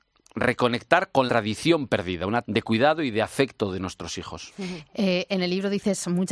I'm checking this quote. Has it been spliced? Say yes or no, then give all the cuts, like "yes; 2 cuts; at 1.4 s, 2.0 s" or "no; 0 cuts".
yes; 2 cuts; at 1.3 s, 2.4 s